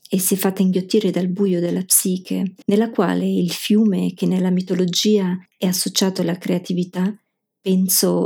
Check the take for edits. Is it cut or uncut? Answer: cut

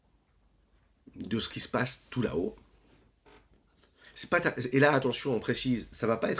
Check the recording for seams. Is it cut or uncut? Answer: uncut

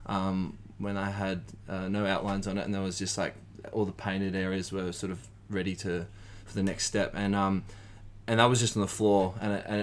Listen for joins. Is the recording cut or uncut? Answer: uncut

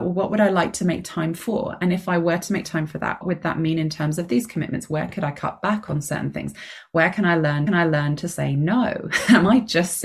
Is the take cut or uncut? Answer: cut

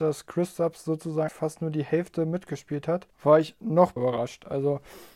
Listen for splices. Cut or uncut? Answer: cut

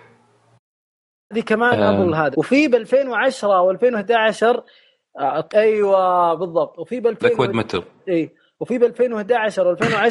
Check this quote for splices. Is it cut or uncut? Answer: cut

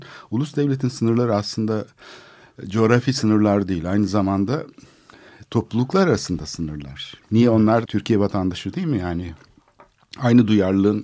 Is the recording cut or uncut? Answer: cut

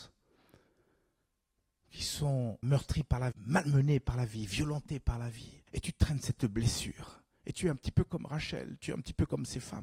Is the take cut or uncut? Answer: cut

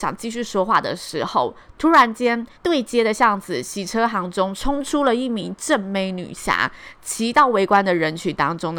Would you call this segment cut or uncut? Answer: cut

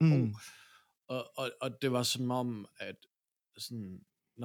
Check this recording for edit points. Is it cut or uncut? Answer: uncut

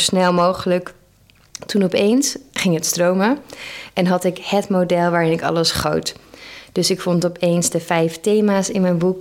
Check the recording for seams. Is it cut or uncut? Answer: uncut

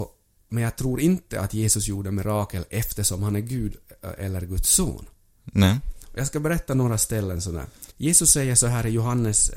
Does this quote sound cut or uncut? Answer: cut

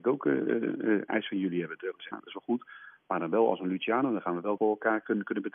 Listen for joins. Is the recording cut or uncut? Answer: cut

